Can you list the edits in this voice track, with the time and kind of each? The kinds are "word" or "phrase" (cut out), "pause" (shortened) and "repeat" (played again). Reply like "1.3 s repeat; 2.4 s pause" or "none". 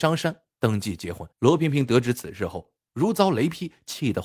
1.3 s pause